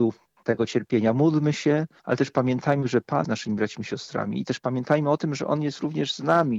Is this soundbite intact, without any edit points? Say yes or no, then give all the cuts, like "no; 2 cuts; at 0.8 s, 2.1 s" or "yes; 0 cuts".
no; 1 cut; at 3.2 s